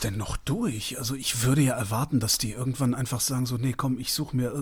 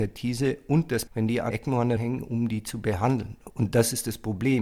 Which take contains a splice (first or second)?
second